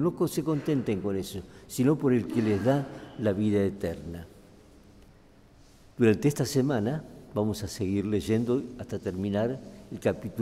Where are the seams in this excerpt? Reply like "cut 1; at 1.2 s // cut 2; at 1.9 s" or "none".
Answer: none